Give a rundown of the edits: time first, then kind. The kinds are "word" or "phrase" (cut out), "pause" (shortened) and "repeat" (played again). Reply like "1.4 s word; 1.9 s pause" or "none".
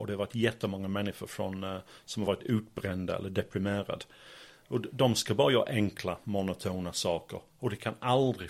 none